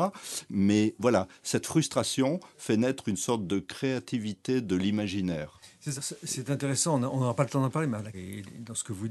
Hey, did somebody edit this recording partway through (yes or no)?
yes